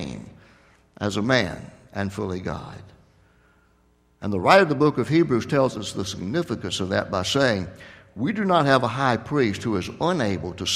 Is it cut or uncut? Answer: uncut